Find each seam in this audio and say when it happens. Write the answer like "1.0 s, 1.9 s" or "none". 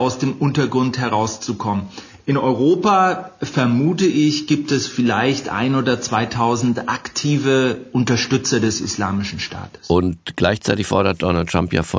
none